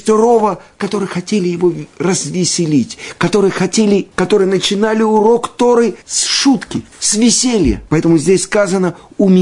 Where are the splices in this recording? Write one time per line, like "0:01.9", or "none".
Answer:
0:04.1
0:06.0
0:06.9
0:07.9